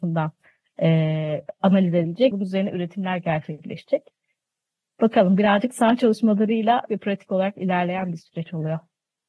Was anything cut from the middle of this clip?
yes; 2 cuts; at 2.3 s, 6.9 s

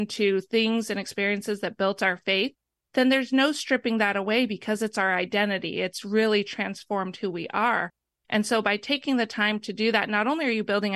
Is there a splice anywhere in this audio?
no; 0 cuts

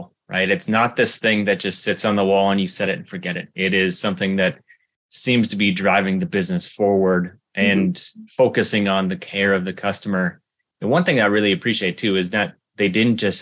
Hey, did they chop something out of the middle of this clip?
no; 0 cuts

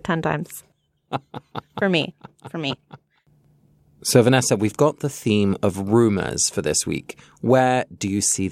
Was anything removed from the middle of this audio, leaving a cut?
no; 0 cuts

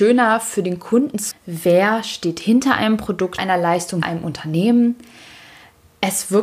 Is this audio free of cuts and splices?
no; 3 cuts; at 1.3 s, 3.4 s, 4.0 s

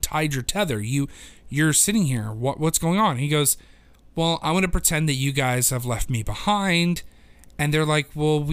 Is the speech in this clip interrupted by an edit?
no; 0 cuts

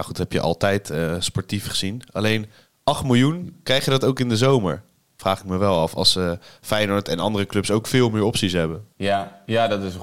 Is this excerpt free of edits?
yes; 0 cuts

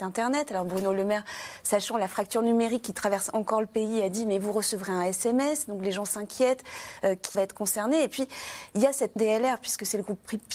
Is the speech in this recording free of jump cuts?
no; 2 cuts; at 7.3 s, 9.2 s

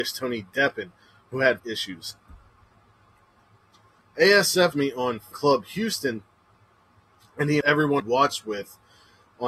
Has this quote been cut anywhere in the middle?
yes; 5 cuts; at 1.6 s, 4.7 s, 5.3 s, 7.6 s, 8.0 s

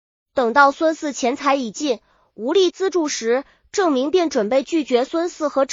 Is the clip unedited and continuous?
yes; 0 cuts

